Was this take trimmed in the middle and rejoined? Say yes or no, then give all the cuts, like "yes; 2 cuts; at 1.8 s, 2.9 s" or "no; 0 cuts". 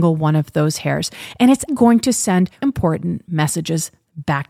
yes; 2 cuts; at 1.7 s, 2.6 s